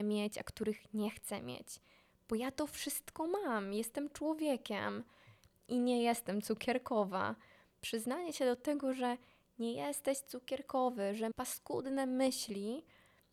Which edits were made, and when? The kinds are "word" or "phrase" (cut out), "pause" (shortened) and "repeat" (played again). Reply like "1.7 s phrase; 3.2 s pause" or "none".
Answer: 11.3 s word